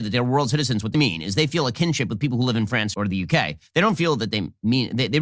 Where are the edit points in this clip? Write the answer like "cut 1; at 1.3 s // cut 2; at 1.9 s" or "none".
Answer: cut 1; at 0.9 s // cut 2; at 2.9 s